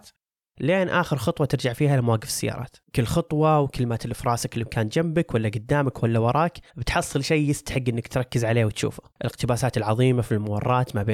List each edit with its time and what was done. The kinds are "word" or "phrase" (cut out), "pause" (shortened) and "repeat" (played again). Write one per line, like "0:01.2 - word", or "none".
0:02.9 - pause
0:06.7 - pause
0:09.1 - pause